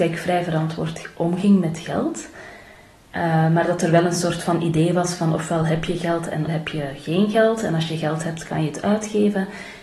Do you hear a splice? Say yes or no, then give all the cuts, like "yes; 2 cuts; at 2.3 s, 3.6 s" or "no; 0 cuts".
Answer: yes; 1 cut; at 6.5 s